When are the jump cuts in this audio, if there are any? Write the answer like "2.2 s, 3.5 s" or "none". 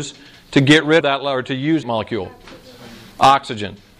1.0 s, 1.8 s